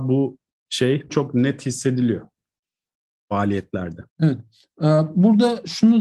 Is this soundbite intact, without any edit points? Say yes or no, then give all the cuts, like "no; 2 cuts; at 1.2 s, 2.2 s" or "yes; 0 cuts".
no; 2 cuts; at 1.1 s, 4.1 s